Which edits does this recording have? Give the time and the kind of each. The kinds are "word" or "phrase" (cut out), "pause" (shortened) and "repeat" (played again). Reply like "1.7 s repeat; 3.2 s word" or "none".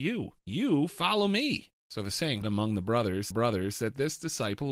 2.4 s word; 3.3 s repeat